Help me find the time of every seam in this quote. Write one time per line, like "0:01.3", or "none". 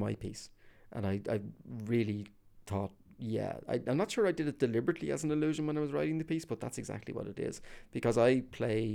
none